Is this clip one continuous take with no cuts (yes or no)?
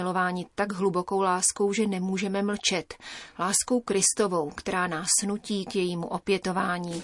yes